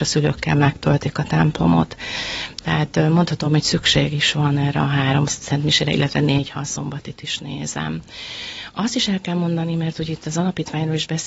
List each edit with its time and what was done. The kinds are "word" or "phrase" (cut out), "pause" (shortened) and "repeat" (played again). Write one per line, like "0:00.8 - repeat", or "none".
none